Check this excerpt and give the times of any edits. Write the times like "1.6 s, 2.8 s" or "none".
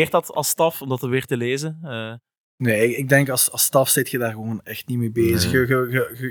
none